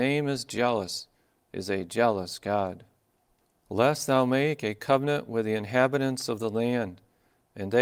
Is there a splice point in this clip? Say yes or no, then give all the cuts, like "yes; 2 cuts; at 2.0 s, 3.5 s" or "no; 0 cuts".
no; 0 cuts